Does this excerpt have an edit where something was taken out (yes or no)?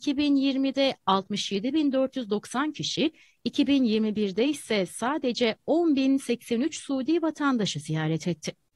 no